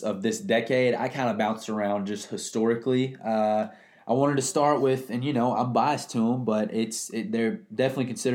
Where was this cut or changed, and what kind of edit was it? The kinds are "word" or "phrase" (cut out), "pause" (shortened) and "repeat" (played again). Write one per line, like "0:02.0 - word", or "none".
none